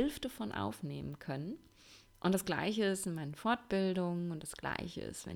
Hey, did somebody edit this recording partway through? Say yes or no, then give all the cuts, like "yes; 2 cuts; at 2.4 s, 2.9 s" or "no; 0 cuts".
no; 0 cuts